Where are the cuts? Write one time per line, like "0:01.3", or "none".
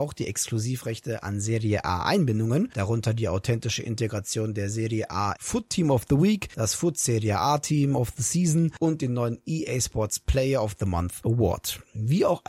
0:05.4